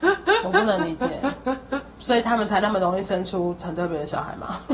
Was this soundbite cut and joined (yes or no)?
yes